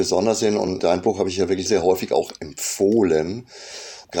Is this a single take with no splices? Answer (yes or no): no